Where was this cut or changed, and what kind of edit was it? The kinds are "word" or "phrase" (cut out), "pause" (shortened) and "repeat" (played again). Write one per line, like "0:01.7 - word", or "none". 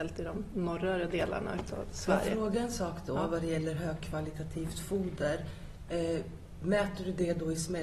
none